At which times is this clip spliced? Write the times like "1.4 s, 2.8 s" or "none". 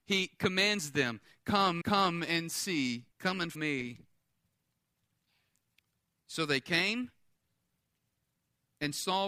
1.8 s, 3.1 s, 3.5 s